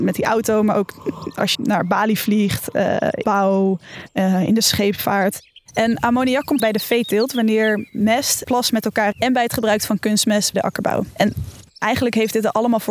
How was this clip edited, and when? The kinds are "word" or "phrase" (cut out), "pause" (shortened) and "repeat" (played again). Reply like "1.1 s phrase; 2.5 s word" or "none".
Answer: 1.5 s word; 3.2 s word; 6.6 s word; 8.4 s word; 9.1 s word; 10.5 s word; 11.7 s word